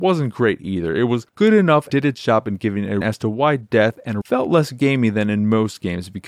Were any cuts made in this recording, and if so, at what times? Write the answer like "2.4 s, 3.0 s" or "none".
1.9 s, 3.0 s, 4.2 s